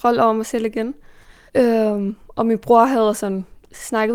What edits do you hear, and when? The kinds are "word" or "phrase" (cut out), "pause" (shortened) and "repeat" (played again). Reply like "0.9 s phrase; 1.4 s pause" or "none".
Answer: 1.5 s pause